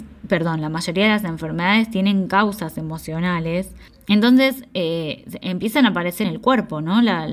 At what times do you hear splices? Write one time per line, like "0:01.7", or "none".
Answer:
0:03.9
0:06.2